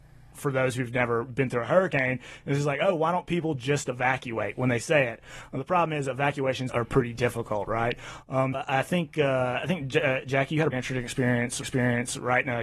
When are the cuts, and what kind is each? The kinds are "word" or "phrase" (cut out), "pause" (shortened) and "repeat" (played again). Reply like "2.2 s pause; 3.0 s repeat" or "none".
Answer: 6.7 s word; 8.5 s word; 10.7 s word; 11.6 s repeat